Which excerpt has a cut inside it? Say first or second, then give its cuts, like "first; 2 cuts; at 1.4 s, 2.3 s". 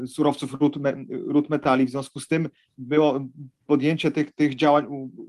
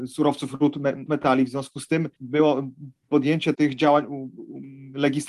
second; 3 cuts; at 1.1 s, 2.1 s, 3.5 s